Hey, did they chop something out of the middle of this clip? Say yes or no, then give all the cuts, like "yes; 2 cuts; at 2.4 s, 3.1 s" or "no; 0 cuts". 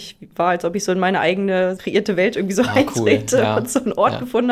yes; 1 cut; at 1.8 s